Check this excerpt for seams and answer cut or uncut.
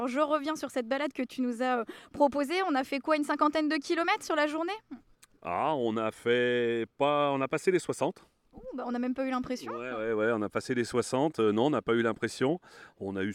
uncut